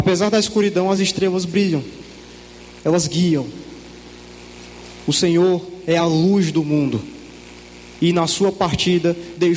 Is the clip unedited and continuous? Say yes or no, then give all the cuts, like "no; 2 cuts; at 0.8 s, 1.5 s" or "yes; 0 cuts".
yes; 0 cuts